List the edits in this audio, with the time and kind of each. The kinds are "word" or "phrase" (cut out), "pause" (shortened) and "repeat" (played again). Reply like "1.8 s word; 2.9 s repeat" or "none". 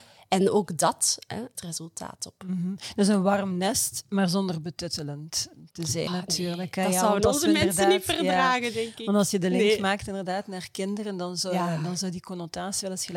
1.5 s word; 6.1 s word